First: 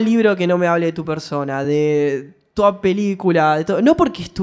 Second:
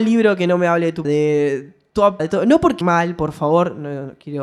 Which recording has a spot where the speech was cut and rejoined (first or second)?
second